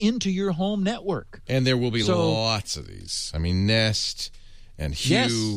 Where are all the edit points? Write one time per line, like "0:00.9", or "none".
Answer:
none